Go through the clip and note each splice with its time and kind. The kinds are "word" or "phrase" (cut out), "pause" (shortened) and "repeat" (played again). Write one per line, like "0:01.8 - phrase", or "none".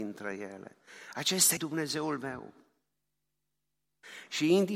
0:01.6 - word